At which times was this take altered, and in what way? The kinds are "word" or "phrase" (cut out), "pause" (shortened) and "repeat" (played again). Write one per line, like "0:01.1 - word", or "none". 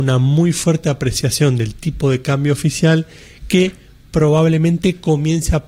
none